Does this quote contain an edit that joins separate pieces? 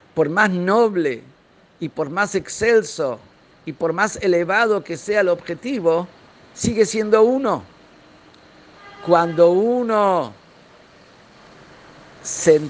no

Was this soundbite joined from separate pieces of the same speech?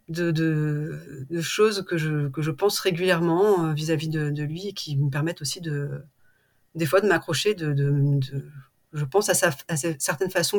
no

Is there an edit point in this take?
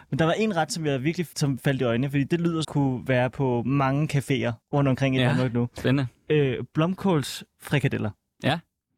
yes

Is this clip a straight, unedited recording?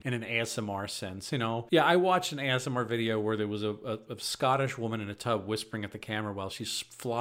yes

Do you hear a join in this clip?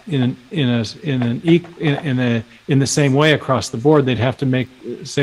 no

